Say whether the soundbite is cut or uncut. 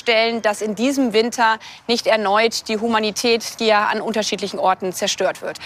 uncut